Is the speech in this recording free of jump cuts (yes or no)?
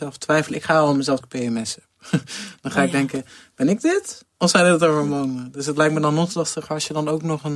no